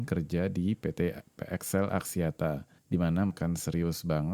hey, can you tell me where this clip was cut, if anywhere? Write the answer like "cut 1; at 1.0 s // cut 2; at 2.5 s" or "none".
cut 1; at 2.8 s // cut 2; at 3.3 s